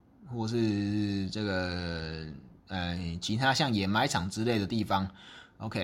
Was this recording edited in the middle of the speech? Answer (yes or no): yes